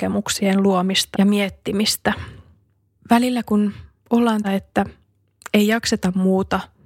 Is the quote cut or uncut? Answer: cut